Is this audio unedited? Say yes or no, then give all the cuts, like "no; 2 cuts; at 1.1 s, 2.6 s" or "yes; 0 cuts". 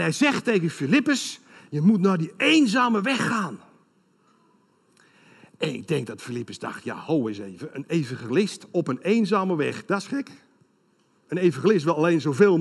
yes; 0 cuts